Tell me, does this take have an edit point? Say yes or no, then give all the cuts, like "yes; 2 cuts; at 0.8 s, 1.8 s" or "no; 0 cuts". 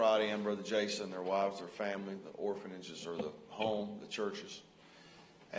no; 0 cuts